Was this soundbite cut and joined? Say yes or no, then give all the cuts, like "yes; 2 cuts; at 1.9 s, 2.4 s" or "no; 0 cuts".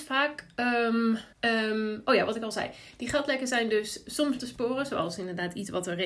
yes; 2 cuts; at 1.3 s, 4.4 s